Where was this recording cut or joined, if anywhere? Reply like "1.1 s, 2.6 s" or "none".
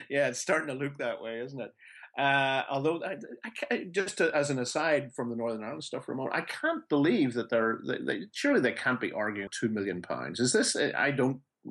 9.5 s